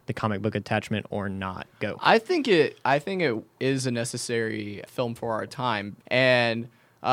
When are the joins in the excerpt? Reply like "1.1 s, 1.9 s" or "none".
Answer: 1.7 s, 4.9 s, 6.0 s